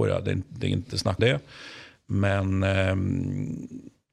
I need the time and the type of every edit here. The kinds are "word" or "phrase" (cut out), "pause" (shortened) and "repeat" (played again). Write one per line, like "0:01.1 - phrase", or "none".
0:01.2 - word